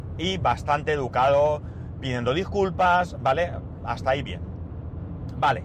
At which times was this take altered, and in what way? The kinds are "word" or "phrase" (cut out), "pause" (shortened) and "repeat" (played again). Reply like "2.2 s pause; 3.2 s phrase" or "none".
none